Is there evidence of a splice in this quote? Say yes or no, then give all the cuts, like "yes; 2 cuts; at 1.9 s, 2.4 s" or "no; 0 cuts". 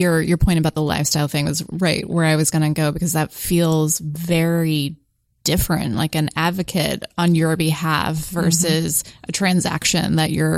no; 0 cuts